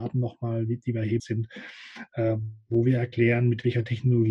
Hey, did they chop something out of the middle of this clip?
yes; 1 cut; at 1.2 s

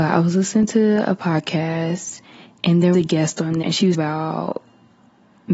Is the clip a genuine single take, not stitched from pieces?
no; 3 cuts; at 2.9 s, 3.6 s, 3.9 s

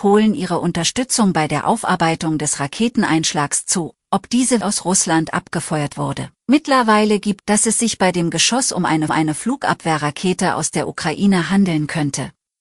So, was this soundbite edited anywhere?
yes; 4 cuts; at 4.6 s, 6.4 s, 7.4 s, 9.1 s

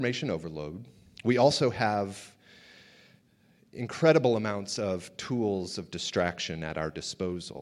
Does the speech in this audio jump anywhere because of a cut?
no; 0 cuts

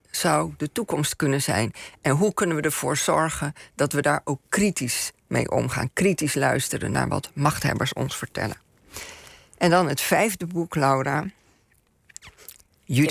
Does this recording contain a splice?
no; 0 cuts

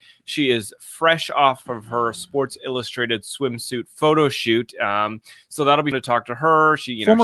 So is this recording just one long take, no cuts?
no; 1 cut; at 5.9 s

